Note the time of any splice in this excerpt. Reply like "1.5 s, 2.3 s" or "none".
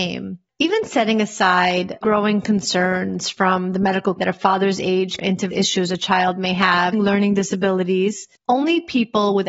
2.0 s, 4.2 s, 5.2 s, 5.5 s, 6.9 s